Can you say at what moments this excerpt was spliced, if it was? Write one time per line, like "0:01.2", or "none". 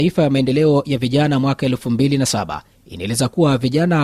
none